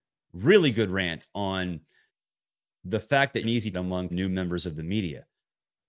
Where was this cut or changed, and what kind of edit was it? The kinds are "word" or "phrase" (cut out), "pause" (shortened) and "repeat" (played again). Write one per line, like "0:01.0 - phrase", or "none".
0:02.1 - pause
0:03.4 - word
0:03.7 - word
0:04.1 - phrase